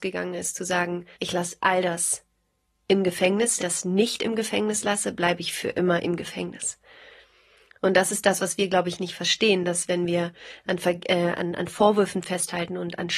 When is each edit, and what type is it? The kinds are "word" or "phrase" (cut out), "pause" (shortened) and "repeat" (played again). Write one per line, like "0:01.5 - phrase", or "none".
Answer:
0:01.1 - pause
0:03.6 - phrase